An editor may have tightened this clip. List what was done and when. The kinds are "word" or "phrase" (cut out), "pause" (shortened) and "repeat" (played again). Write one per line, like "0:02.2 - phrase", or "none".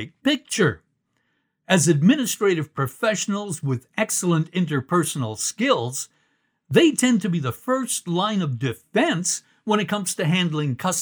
none